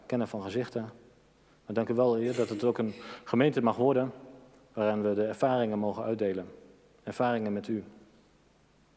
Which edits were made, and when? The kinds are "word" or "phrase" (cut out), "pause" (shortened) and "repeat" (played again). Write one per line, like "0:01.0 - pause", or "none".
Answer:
none